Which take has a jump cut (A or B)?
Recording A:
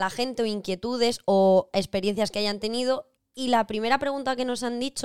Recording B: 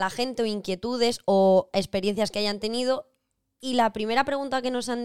A